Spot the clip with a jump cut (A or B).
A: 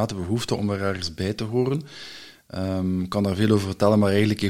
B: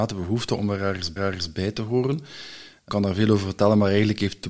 B